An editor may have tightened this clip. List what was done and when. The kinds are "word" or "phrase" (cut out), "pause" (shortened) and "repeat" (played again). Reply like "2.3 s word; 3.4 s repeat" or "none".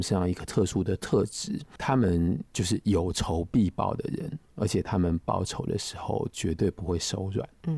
2.5 s pause; 4.5 s pause